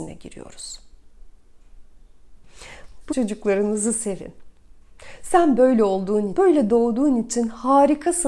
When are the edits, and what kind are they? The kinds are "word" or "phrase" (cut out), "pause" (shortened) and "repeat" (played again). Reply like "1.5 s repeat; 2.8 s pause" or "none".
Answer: 3.1 s phrase; 6.3 s word